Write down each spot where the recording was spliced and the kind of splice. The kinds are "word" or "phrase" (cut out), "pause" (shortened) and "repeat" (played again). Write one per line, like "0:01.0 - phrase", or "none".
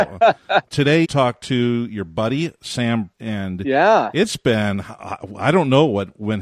0:01.0 - word
0:03.1 - word